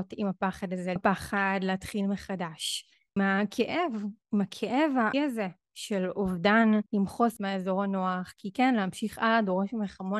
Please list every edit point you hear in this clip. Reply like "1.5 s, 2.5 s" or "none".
1.0 s, 3.2 s, 5.1 s, 6.9 s, 7.4 s